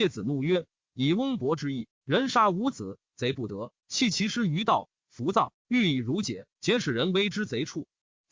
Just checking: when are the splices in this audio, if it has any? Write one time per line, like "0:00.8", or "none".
0:03.8
0:06.5